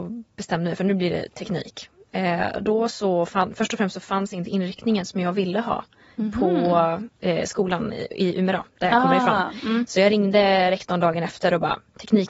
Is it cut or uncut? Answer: uncut